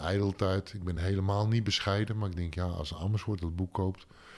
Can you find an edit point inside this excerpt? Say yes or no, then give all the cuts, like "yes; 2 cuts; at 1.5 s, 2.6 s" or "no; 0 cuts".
no; 0 cuts